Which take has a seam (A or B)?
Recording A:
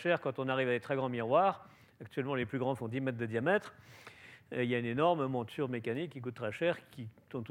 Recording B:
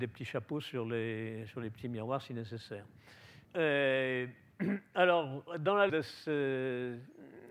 B